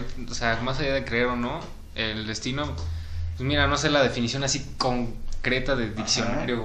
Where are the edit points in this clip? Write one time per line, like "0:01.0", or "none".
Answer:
none